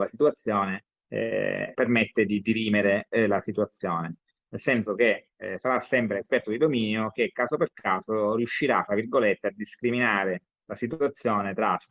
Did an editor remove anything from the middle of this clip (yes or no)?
yes